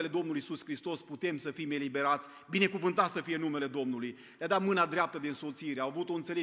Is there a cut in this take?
no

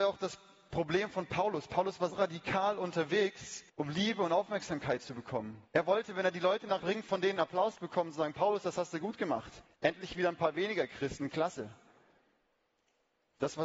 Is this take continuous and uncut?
no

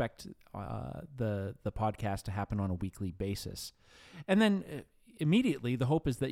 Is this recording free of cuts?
yes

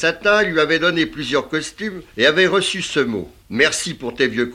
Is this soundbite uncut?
no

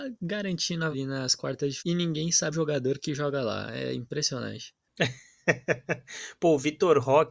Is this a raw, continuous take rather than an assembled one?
no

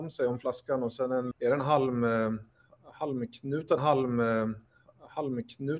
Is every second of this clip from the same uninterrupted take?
no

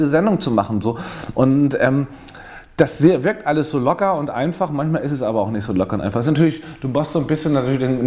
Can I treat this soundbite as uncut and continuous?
yes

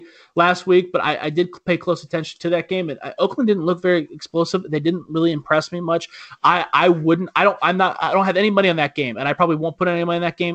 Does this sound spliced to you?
no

